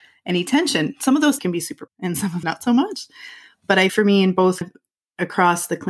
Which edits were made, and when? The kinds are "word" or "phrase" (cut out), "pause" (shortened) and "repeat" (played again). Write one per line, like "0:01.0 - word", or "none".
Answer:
0:01.4 - word
0:01.9 - word
0:02.4 - word
0:03.9 - word
0:04.6 - word